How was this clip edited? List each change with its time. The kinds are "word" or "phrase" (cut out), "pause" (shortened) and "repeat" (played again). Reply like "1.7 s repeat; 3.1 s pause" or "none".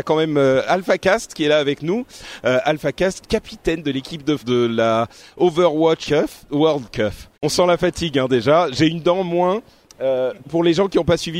3.2 s phrase; 4.4 s word; 6.0 s word; 7.3 s pause; 10.4 s word